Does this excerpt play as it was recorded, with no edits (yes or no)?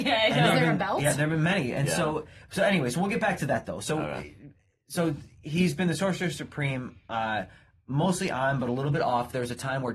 yes